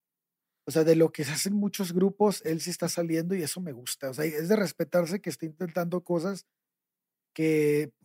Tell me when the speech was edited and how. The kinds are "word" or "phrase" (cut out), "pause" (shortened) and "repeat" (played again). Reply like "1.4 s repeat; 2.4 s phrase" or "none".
none